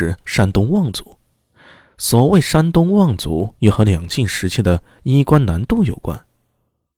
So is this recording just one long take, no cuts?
no; 1 cut; at 3.6 s

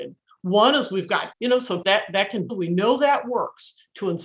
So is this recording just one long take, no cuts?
no; 3 cuts; at 1.3 s, 1.8 s, 2.5 s

